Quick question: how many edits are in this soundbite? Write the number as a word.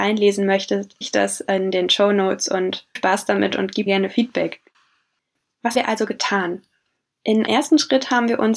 five